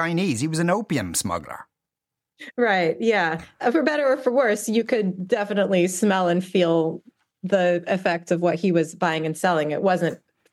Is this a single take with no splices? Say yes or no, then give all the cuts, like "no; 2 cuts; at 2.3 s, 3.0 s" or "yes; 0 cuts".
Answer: yes; 0 cuts